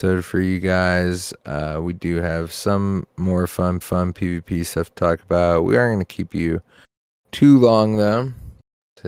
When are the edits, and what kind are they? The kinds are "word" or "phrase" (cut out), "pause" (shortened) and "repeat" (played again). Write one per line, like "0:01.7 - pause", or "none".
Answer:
0:03.8 - repeat